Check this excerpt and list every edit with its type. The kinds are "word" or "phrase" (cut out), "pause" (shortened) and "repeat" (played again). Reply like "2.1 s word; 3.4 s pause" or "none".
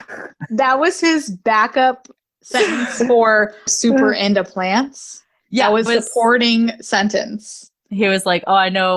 3.7 s word; 5.9 s word